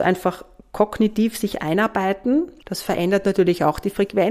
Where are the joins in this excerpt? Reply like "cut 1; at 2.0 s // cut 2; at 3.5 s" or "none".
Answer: none